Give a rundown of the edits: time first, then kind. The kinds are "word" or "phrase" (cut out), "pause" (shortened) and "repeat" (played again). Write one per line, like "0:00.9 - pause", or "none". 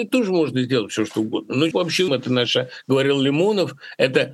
0:01.7 - word
0:02.1 - word